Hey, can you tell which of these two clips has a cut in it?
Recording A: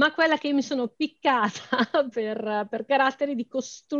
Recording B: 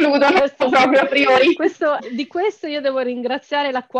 B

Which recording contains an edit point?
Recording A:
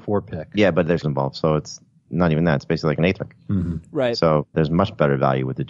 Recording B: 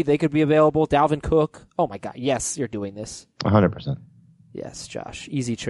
A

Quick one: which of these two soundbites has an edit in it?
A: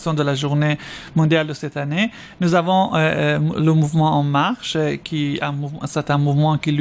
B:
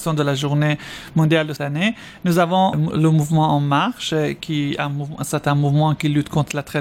B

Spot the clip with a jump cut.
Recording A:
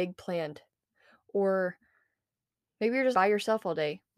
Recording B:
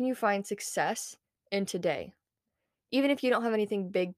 A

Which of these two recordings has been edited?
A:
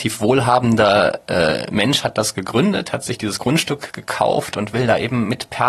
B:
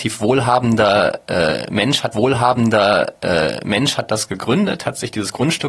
B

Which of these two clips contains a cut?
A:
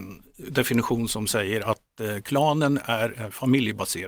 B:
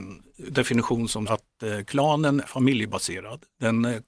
B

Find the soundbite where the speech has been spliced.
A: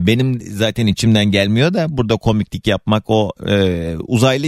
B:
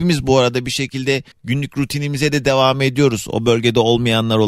B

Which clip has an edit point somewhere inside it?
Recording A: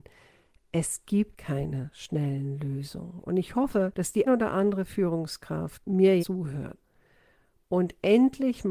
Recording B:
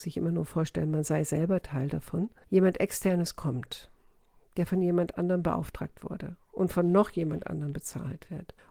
A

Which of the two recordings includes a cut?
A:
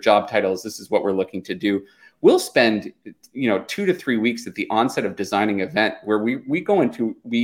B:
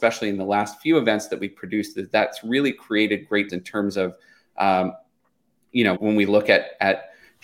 B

